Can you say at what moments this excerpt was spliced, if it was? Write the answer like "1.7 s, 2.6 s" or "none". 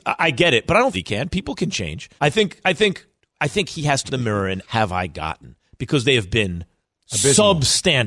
0.9 s, 2.2 s, 3.2 s, 4.1 s, 4.6 s